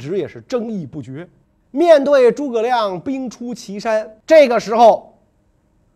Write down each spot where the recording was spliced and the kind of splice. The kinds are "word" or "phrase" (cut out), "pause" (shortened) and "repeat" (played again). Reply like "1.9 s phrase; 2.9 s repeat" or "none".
1.4 s pause; 4.2 s pause